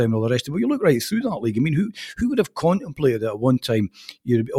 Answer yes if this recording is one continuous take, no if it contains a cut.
yes